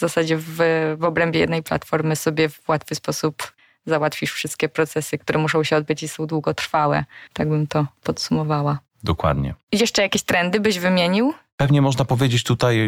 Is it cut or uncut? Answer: cut